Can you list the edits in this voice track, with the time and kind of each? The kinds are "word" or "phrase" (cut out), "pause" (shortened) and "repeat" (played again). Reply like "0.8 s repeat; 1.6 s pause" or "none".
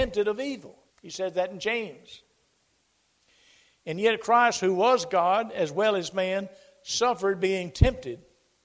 0.9 s pause